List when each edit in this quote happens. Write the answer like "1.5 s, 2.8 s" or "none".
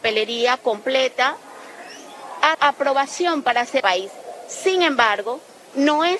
2.5 s, 3.8 s